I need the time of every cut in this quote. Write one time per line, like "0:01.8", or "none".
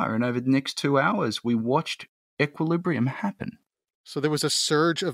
none